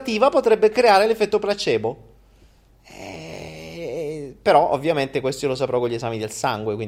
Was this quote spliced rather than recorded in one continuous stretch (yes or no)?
no